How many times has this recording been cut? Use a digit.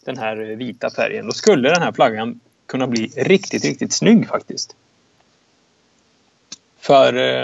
0